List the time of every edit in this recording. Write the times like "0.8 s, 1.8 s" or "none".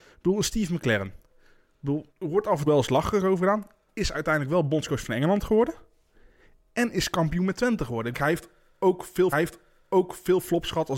2.1 s, 2.7 s, 8.1 s, 9.3 s